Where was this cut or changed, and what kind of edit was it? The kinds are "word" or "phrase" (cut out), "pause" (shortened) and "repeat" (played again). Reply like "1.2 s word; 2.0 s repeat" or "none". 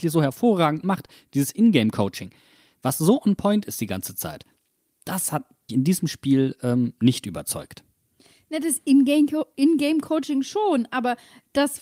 5.7 s word

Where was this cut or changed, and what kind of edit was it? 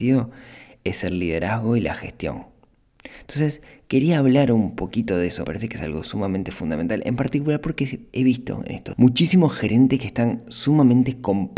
5.4 s word; 8.1 s pause; 8.9 s word

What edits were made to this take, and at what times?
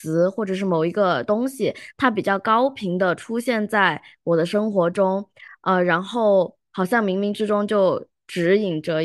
none

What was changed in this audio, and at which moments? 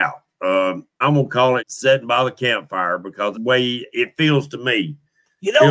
1.0 s word; 1.6 s word; 3.3 s word

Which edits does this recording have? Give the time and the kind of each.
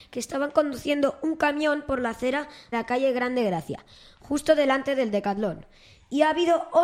2.7 s word

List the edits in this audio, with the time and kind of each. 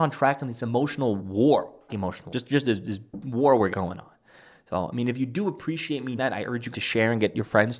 1.9 s word; 2.3 s word; 3.7 s word; 6.2 s word; 6.7 s word

